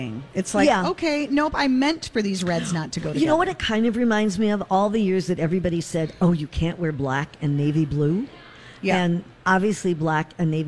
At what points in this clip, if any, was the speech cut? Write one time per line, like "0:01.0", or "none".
none